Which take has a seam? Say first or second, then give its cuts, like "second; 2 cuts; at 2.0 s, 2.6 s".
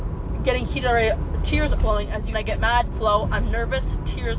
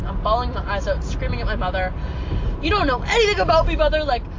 first; 3 cuts; at 1.8 s, 2.3 s, 2.9 s